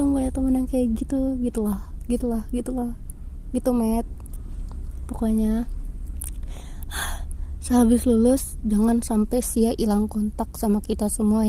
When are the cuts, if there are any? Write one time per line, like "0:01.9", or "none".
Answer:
none